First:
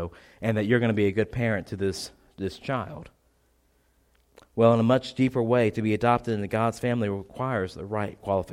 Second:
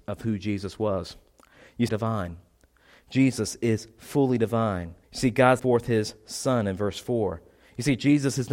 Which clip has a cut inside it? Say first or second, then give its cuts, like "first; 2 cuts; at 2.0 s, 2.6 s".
second; 3 cuts; at 1.9 s, 5.0 s, 5.6 s